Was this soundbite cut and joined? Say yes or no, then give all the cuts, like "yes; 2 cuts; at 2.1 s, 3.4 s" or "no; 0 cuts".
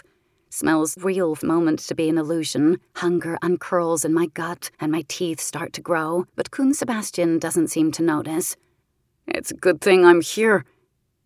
yes; 6 cuts; at 1.0 s, 1.4 s, 2.9 s, 4.7 s, 6.3 s, 8.8 s